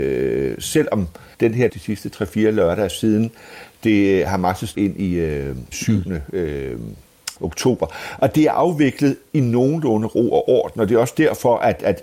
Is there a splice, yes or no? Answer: yes